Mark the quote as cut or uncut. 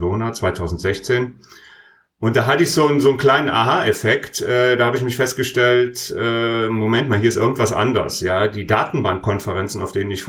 uncut